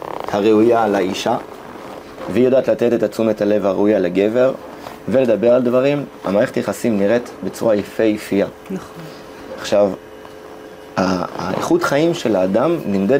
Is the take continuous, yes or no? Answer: yes